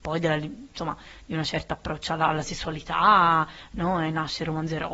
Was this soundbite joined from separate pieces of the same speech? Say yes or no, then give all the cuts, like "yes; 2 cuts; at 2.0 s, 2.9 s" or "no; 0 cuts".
no; 0 cuts